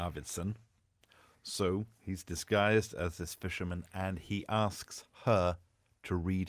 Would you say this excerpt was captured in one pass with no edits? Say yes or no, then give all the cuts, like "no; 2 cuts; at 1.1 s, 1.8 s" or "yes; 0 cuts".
yes; 0 cuts